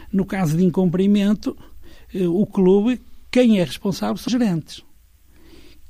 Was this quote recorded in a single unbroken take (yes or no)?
no